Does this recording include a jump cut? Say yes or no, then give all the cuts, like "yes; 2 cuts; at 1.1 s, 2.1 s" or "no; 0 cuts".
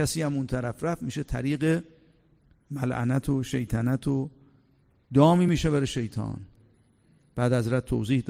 no; 0 cuts